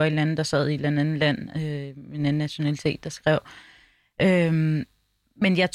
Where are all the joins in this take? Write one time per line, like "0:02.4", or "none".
none